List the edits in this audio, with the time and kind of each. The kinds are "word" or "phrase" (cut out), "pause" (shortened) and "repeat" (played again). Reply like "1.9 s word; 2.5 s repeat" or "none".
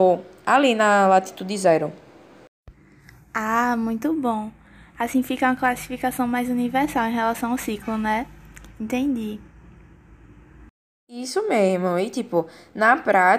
none